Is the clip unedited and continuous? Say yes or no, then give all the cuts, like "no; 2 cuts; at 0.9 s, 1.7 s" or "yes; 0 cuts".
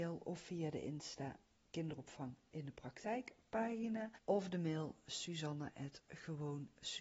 no; 2 cuts; at 1.4 s, 4.2 s